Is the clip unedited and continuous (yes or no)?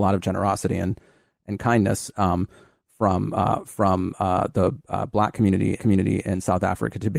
no